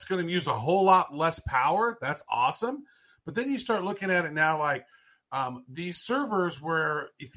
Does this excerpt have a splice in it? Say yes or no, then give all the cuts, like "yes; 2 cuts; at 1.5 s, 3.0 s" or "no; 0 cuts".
no; 0 cuts